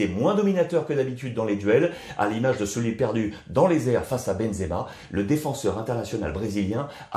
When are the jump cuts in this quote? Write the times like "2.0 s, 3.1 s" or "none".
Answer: none